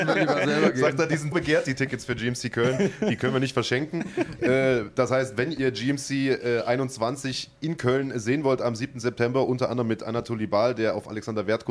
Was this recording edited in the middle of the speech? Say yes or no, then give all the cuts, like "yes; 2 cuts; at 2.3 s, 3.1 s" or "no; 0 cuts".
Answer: yes; 1 cut; at 1.3 s